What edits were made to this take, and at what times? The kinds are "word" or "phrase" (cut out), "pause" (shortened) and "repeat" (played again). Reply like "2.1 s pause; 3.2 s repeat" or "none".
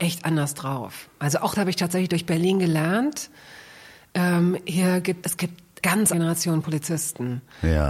1.5 s word; 5.2 s word; 5.8 s word; 6.1 s word